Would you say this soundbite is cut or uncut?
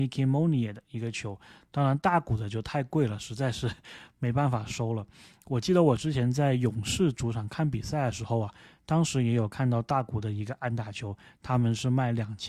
uncut